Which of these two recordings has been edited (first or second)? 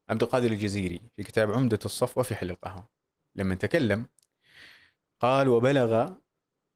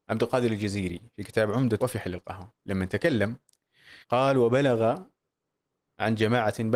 second